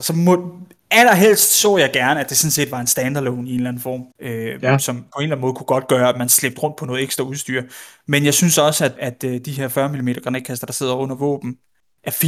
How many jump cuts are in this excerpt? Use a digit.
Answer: 2